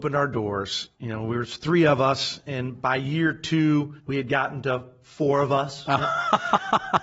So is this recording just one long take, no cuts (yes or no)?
no